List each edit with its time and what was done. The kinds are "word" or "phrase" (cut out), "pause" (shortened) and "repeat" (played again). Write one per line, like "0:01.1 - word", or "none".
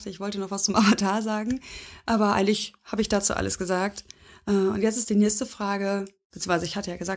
none